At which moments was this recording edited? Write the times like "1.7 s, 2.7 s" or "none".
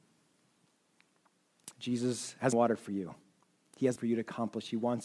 2.5 s, 4.0 s